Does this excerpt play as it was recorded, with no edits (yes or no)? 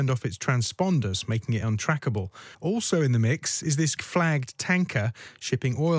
no